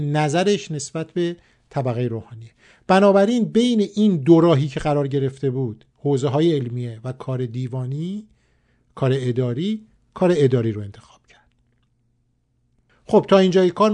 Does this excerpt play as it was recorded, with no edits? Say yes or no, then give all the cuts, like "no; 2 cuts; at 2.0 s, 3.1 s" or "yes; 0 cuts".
yes; 0 cuts